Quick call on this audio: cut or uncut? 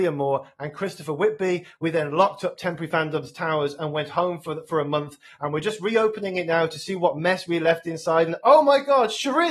uncut